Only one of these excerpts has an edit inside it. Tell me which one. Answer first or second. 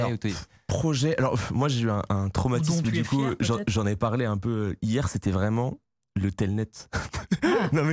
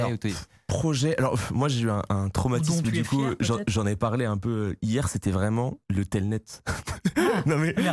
second